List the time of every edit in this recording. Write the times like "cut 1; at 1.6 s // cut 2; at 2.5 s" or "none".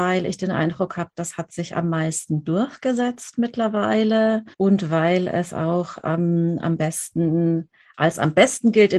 cut 1; at 4.5 s